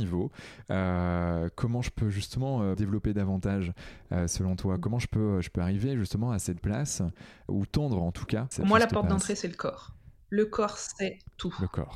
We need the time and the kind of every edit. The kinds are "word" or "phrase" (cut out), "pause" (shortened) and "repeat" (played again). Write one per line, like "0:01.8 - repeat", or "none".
0:02.7 - word
0:06.6 - word
0:07.5 - word
0:08.5 - word